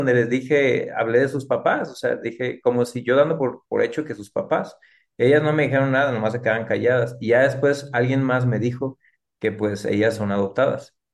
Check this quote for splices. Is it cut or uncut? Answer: uncut